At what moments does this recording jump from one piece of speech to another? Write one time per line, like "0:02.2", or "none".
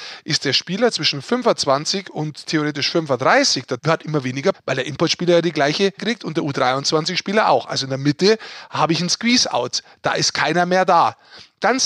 0:03.8
0:04.5
0:06.0